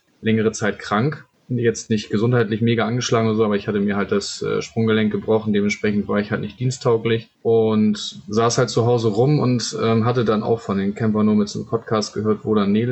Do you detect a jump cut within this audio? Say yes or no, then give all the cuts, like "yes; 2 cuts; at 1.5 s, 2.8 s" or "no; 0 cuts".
yes; 1 cut; at 7.3 s